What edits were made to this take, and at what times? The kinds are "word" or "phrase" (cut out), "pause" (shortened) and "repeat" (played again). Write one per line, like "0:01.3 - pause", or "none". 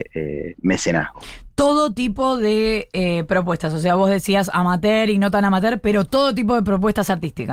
none